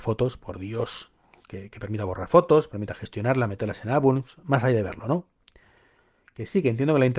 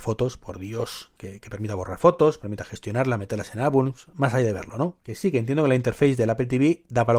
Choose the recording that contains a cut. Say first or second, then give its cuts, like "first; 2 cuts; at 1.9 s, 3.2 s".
second; 2 cuts; at 1.2 s, 5.0 s